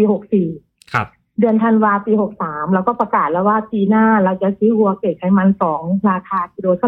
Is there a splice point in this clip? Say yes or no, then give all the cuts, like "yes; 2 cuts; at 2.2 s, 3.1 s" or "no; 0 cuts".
no; 0 cuts